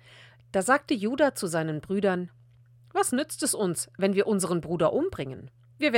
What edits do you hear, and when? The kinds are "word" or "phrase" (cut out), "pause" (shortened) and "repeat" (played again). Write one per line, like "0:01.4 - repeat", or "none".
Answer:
none